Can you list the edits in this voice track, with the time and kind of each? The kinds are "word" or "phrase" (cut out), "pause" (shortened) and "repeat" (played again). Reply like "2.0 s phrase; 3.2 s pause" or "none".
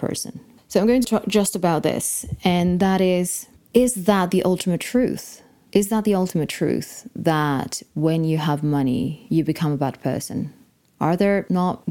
none